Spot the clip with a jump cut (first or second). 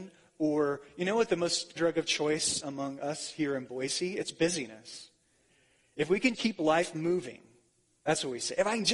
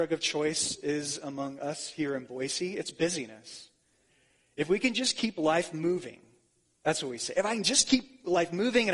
first